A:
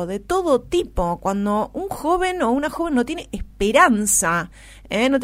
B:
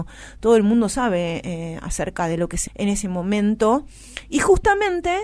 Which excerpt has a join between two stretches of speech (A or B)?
B